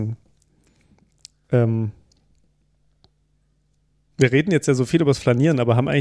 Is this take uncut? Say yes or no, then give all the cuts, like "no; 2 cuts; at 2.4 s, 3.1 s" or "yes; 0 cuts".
yes; 0 cuts